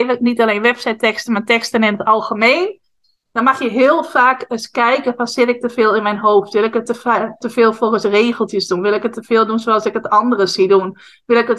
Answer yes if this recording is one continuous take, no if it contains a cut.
yes